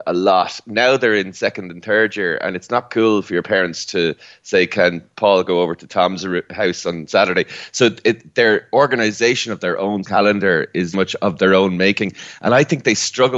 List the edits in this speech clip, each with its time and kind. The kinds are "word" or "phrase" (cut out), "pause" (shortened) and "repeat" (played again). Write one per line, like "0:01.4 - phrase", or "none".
0:10.0 - word
0:10.9 - word